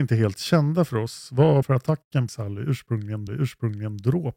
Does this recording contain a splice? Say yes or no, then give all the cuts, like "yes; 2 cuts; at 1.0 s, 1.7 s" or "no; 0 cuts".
yes; 3 cuts; at 1.6 s, 2.3 s, 3.3 s